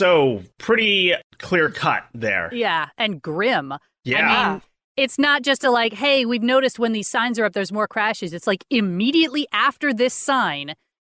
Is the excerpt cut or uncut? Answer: uncut